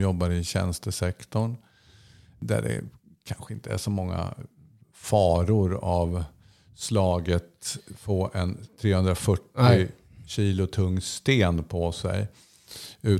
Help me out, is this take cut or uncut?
uncut